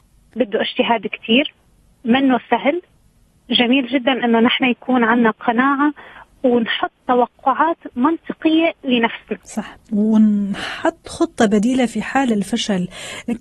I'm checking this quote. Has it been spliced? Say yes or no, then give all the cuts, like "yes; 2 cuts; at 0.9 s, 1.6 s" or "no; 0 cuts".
no; 0 cuts